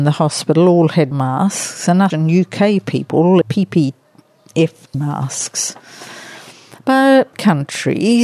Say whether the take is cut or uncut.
cut